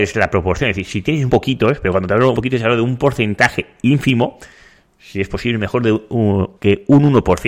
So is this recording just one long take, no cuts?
no; 3 cuts; at 1.3 s, 2.3 s, 6.6 s

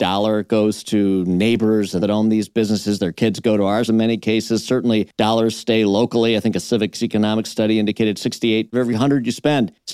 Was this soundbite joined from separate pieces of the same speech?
yes; 3 cuts; at 2.0 s, 3.9 s, 8.7 s

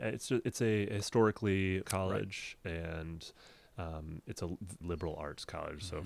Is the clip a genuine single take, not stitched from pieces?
no; 2 cuts; at 1.8 s, 4.8 s

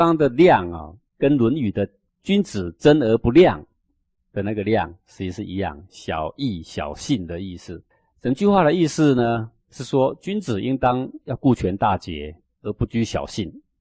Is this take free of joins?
no; 2 cuts; at 1.1 s, 7.9 s

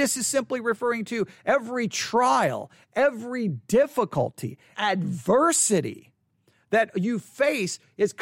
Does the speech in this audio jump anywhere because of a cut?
yes; 1 cut; at 4.7 s

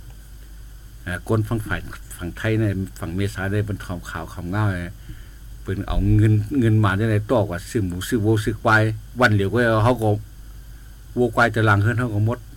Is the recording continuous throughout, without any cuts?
no; 1 cut; at 7.6 s

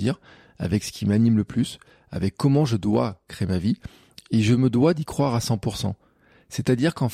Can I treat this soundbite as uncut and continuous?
yes; 0 cuts

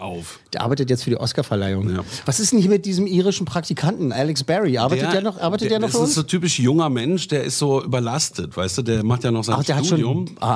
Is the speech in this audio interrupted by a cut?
no; 0 cuts

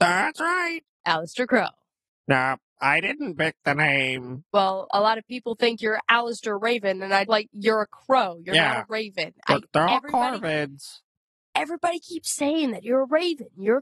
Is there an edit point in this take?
yes; 1 cut; at 7.3 s

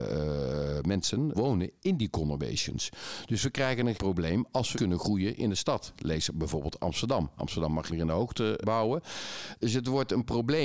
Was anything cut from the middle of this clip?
yes; 5 cuts; at 1.3 s, 3.9 s, 4.7 s, 7.9 s, 8.6 s

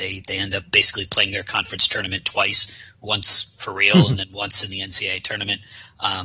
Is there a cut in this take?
no; 0 cuts

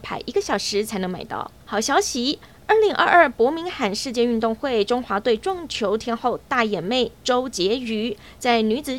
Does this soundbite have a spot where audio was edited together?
yes; 1 cut; at 1.6 s

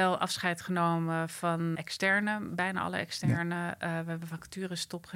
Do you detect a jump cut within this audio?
yes; 1 cut; at 1.7 s

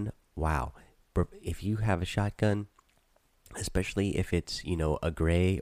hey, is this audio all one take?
yes; 0 cuts

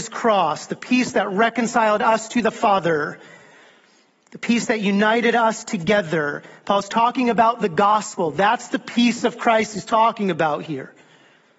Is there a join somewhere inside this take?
no; 0 cuts

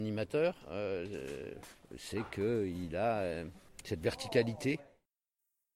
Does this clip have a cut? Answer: no; 0 cuts

